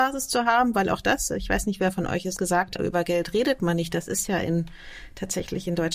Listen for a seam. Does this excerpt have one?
yes; 2 cuts; at 2.4 s, 2.8 s

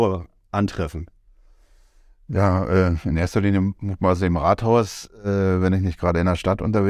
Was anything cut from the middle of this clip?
no; 0 cuts

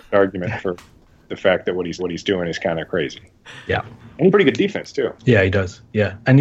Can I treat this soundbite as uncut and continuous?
no; 3 cuts; at 2.0 s, 4.3 s, 5.2 s

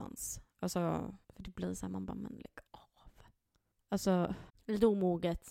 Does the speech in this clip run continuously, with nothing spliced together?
no; 3 cuts; at 1.2 s, 2.7 s, 4.5 s

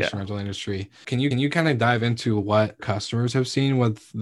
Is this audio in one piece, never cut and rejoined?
no; 2 cuts; at 1.3 s, 2.8 s

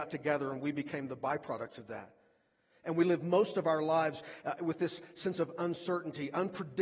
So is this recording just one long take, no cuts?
yes; 0 cuts

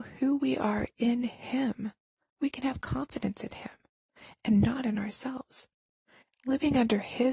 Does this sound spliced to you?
no; 0 cuts

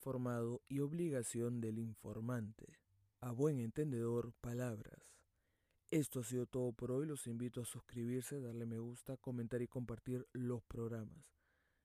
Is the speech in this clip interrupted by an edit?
yes; 1 cut; at 4.4 s

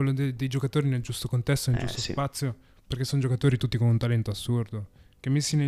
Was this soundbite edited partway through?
no; 0 cuts

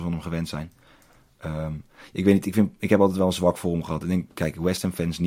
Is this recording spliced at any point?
no; 0 cuts

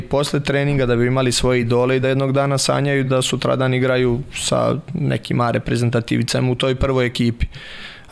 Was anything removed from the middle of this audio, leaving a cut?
no; 0 cuts

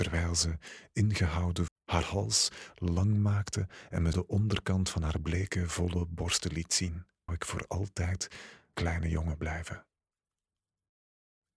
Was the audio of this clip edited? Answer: yes; 4 cuts; at 1.7 s, 4.1 s, 7.3 s, 8.7 s

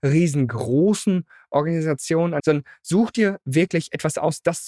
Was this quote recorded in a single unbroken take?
no; 1 cut; at 2.4 s

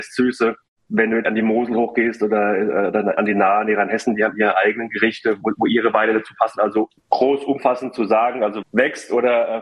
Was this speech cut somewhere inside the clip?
yes; 4 cuts; at 1.2 s, 5.4 s, 7.0 s, 8.6 s

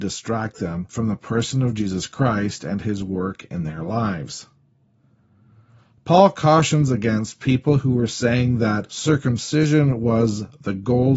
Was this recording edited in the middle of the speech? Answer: no; 0 cuts

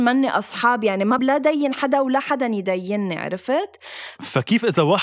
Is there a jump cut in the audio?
yes; 1 cut; at 1.2 s

